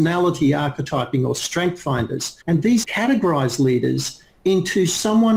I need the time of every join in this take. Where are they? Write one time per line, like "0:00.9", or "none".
0:02.4
0:02.8